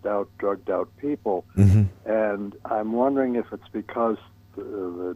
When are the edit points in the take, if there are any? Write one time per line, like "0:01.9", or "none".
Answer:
0:02.6